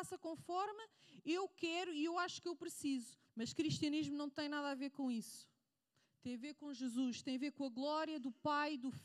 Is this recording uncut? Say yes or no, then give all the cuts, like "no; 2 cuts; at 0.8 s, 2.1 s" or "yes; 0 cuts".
no; 1 cut; at 3.3 s